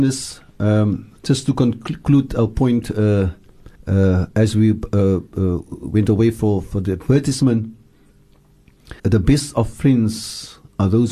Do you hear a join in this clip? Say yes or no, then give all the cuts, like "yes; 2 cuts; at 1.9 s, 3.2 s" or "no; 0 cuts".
yes; 2 cuts; at 3.8 s, 9.0 s